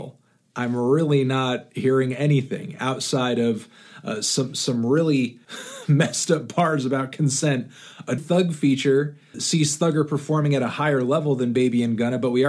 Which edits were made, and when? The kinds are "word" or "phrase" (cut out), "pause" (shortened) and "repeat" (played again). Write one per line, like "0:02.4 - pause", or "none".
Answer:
0:05.4 - pause
0:08.2 - phrase
0:09.3 - word